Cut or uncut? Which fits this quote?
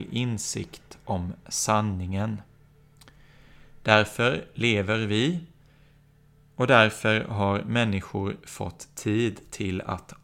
uncut